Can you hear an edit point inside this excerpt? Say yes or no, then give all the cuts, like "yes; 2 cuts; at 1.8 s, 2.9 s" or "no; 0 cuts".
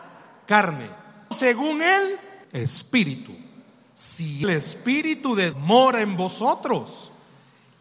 yes; 4 cuts; at 1.3 s, 2.4 s, 4.4 s, 5.5 s